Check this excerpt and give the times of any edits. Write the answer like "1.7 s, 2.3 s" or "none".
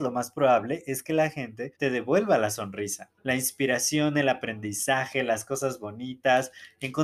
1.7 s, 3.2 s